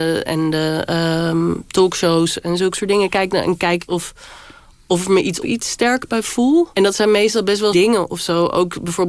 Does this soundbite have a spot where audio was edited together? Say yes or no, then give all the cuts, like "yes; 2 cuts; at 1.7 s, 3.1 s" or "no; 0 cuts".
yes; 4 cuts; at 3.9 s, 5.4 s, 6.7 s, 7.7 s